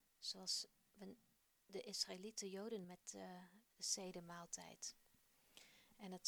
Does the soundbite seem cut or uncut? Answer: cut